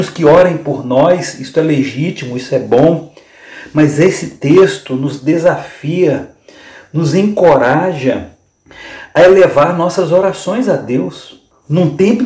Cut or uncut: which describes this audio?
uncut